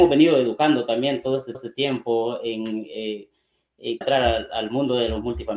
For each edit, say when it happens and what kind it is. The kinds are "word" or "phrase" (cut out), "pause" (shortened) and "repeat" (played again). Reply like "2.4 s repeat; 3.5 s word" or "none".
1.5 s repeat; 4.0 s phrase

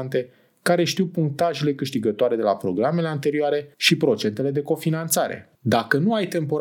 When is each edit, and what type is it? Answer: 3.7 s pause; 5.5 s pause

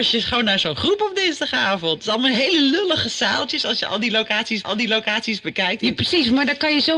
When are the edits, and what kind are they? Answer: 4.6 s repeat

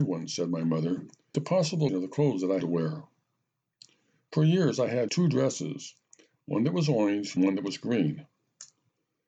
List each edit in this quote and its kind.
1.3 s word; 1.9 s word; 2.6 s word; 5.1 s word; 7.4 s word

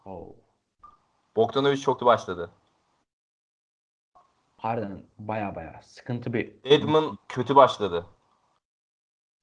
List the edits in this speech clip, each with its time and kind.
2.0 s word

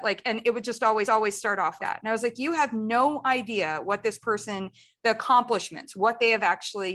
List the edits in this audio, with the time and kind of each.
1.1 s repeat; 1.8 s word

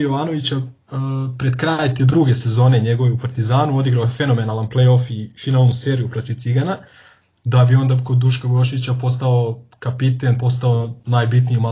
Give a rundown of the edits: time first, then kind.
none

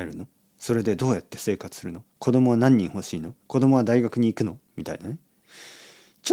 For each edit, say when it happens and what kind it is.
2.1 s pause; 3.4 s pause; 4.6 s pause

